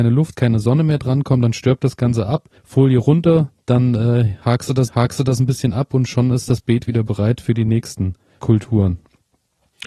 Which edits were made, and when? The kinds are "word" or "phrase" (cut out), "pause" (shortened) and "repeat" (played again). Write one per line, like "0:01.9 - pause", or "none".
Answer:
0:02.6 - pause
0:04.9 - repeat
0:08.4 - word